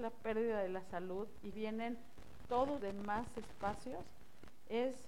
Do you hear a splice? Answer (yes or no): yes